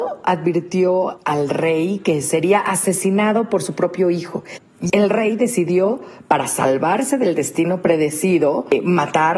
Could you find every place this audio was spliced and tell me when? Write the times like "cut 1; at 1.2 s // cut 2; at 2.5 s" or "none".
cut 1; at 4.9 s